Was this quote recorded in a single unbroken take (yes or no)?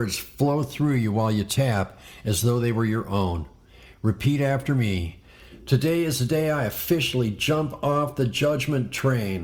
yes